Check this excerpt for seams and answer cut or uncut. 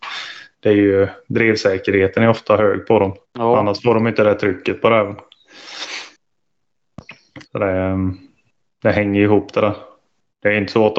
cut